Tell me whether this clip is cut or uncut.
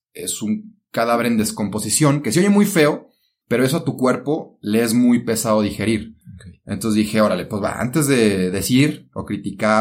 uncut